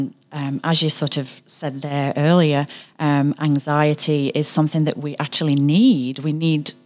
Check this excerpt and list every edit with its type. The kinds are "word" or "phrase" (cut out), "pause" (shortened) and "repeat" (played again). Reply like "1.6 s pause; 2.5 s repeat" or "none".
none